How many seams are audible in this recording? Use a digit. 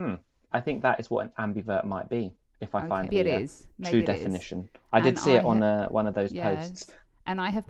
1